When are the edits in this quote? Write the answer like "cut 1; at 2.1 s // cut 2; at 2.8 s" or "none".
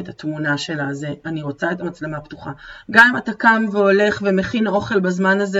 none